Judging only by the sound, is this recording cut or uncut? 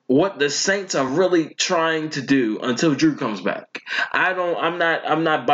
uncut